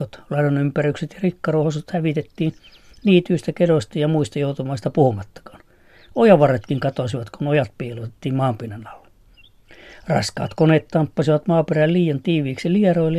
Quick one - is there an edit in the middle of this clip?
no; 0 cuts

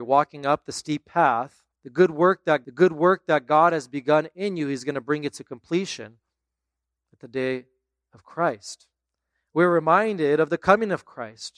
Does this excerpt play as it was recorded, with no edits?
no; 2 cuts; at 1.7 s, 2.6 s

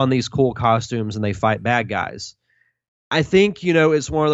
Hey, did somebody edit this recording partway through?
yes; 1 cut; at 2.9 s

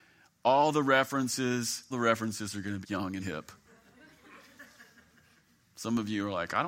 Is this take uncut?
no; 3 cuts; at 1.9 s, 2.8 s, 3.2 s

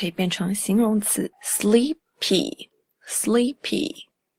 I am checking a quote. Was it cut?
yes; 1 cut; at 1.3 s

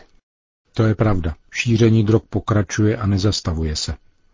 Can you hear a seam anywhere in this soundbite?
no; 0 cuts

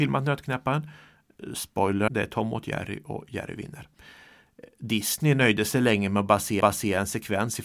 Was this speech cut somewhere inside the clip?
yes; 2 cuts; at 2.1 s, 6.6 s

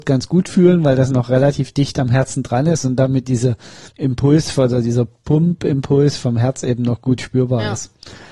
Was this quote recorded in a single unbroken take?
no; 1 cut; at 3.9 s

